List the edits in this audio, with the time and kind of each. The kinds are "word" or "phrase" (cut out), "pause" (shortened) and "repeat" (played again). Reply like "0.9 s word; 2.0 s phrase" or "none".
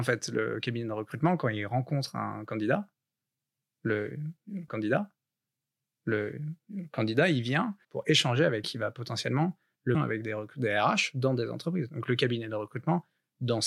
4.7 s repeat; 7.8 s pause; 8.6 s word; 9.9 s phrase